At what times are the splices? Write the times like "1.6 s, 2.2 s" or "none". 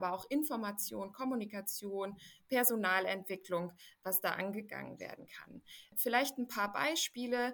none